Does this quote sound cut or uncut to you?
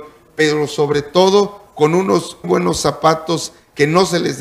cut